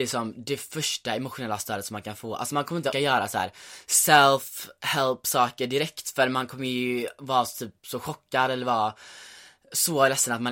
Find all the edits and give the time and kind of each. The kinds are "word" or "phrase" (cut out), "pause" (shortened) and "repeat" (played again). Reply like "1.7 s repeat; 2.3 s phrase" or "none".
2.9 s word